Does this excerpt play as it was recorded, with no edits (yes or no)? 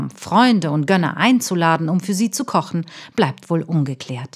yes